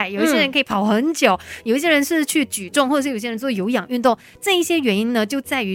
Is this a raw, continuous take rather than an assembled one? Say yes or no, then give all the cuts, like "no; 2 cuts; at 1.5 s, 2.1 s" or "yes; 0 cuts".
yes; 0 cuts